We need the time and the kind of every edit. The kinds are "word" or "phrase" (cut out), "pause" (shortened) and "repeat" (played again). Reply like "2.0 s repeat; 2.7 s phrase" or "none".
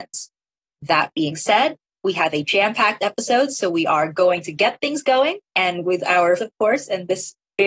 5.5 s pause; 6.4 s phrase

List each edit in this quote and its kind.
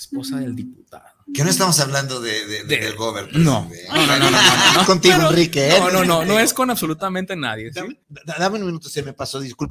4.8 s phrase; 8.0 s pause

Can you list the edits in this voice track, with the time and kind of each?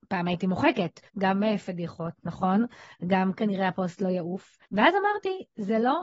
1.1 s pause; 4.7 s pause

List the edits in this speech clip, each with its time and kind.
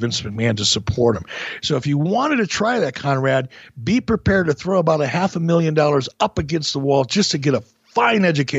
none

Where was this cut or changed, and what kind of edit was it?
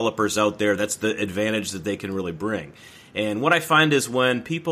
none

